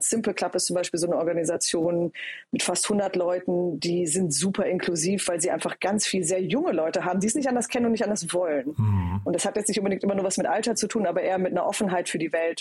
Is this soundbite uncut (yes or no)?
yes